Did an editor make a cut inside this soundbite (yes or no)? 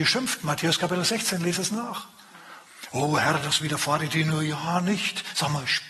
no